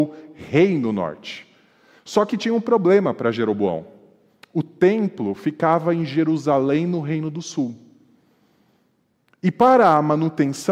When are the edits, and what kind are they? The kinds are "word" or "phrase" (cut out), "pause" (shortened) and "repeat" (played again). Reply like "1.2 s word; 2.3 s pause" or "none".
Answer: none